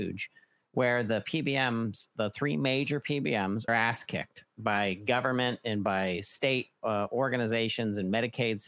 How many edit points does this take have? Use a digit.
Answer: 1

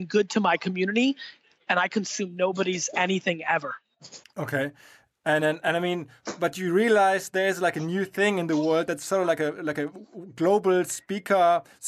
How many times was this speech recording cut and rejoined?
1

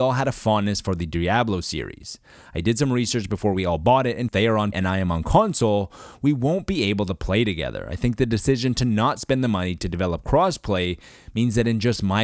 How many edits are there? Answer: 2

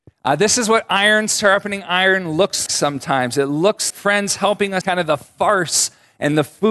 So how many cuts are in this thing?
3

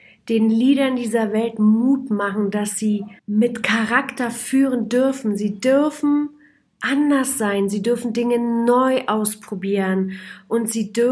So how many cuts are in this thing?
1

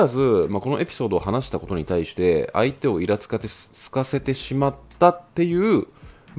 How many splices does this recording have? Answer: 1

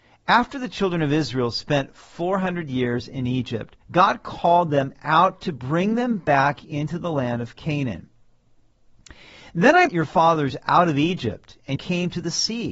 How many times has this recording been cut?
3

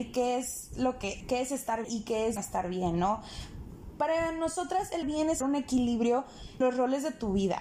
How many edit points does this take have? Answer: 6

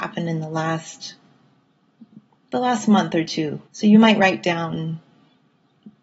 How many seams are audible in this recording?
1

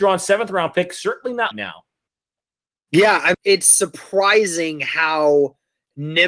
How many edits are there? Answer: 2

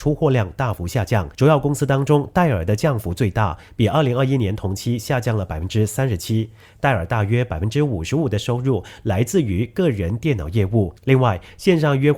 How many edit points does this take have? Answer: 2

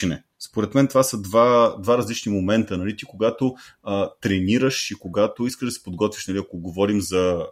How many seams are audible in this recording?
0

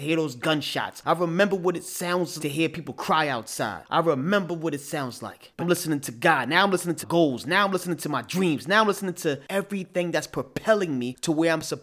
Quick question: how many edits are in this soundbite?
3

